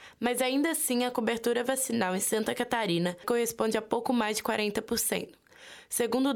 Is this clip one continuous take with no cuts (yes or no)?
yes